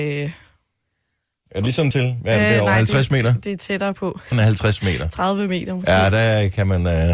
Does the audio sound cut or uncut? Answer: cut